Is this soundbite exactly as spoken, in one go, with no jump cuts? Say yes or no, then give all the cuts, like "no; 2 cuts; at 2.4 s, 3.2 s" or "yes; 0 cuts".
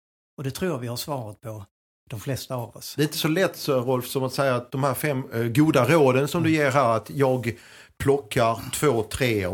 yes; 0 cuts